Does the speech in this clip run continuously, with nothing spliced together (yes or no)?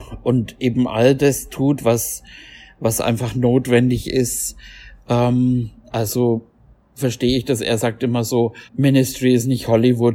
no